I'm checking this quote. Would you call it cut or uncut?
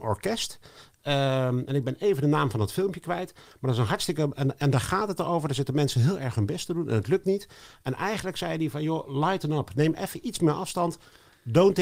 uncut